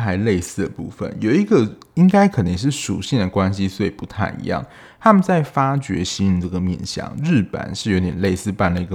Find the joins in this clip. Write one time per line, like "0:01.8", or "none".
none